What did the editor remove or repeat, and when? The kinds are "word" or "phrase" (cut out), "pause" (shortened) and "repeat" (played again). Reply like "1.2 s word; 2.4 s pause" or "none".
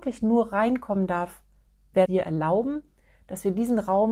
2.1 s phrase